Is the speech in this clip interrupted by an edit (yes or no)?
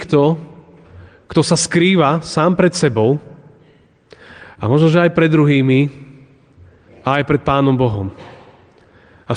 no